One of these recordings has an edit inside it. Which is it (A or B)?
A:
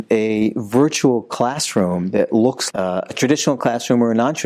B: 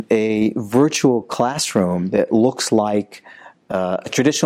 A